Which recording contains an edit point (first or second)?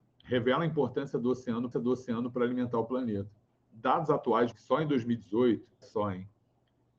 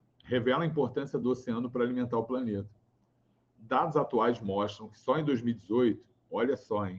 first